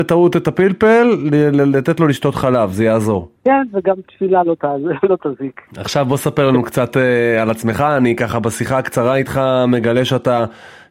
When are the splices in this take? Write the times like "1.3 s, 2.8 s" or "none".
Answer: 3.4 s, 5.7 s